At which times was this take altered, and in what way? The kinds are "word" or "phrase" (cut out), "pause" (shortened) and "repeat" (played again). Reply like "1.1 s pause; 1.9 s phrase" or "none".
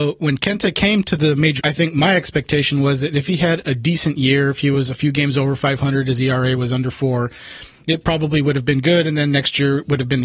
1.6 s word